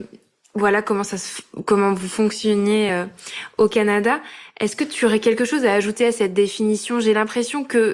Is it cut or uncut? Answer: uncut